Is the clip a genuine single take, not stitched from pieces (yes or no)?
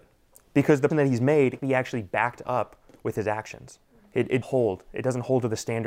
no